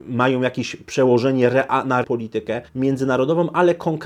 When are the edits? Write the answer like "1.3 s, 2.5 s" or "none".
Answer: 2.0 s, 2.7 s